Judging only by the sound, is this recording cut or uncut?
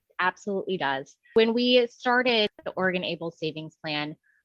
uncut